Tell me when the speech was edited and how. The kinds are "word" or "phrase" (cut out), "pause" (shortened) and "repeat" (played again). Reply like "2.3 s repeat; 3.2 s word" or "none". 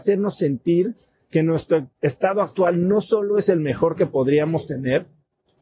none

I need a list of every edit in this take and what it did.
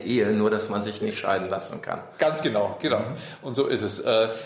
none

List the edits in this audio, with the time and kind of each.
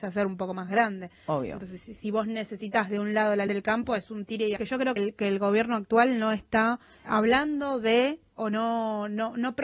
3.5 s word; 4.6 s word; 5.0 s word; 7.0 s word

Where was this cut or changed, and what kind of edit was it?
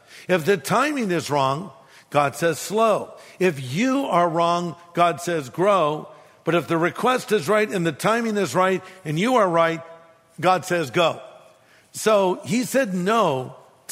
none

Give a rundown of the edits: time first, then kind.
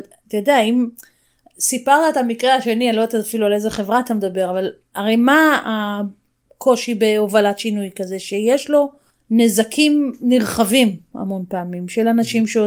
none

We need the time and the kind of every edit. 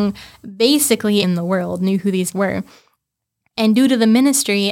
1.2 s word; 2.3 s word

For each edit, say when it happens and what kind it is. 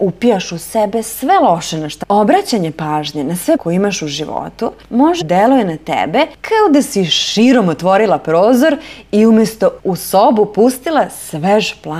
2.0 s word; 3.6 s word; 5.2 s word; 9.8 s word

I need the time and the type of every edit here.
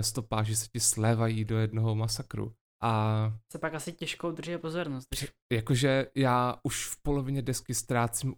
none

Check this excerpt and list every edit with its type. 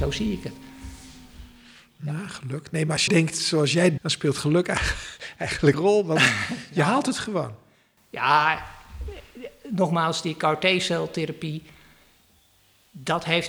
3.1 s word; 4.0 s word; 5.7 s word

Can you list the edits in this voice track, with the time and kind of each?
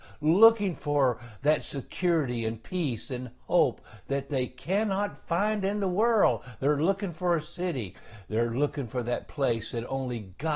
none

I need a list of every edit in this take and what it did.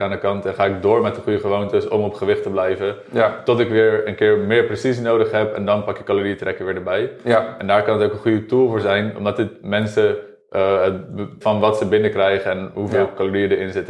11.4 s phrase

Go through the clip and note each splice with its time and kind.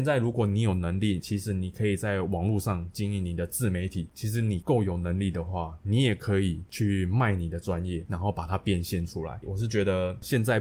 1.2 s phrase

